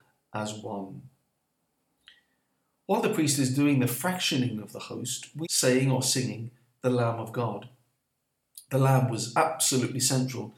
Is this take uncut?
no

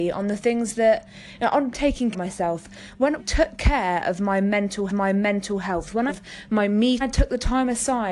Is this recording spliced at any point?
yes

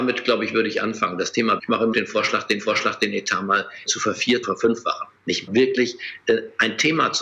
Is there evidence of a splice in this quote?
yes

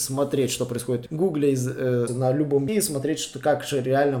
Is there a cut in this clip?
yes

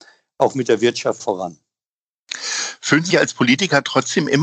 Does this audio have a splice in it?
yes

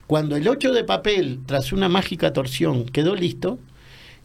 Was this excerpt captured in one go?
yes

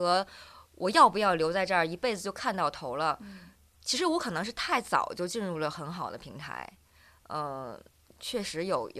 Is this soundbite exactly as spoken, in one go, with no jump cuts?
yes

